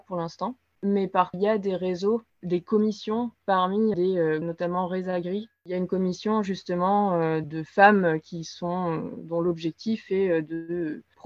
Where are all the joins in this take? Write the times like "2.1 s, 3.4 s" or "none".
1.3 s, 3.9 s, 4.4 s, 7.4 s

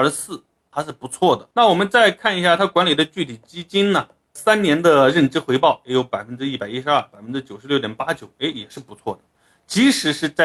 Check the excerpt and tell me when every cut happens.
1.5 s

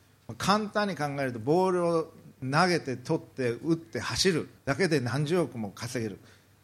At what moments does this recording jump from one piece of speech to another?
4.6 s

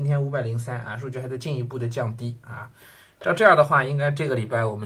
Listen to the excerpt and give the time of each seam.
none

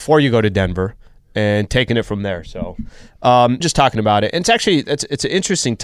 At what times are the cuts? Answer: 3.6 s

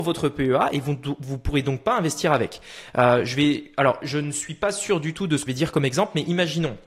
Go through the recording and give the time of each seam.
5.5 s

